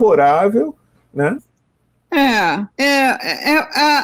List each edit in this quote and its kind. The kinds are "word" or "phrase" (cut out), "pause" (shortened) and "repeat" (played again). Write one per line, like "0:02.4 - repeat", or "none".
0:02.7 - pause